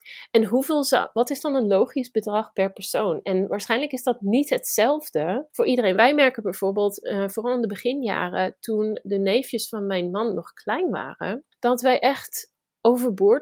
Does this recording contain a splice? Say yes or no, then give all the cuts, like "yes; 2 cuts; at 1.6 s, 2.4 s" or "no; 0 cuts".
yes; 2 cuts; at 5.5 s, 11.5 s